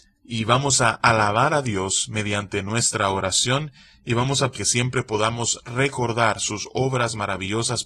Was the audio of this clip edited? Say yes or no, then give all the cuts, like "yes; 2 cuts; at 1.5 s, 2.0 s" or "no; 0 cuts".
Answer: yes; 1 cut; at 4.5 s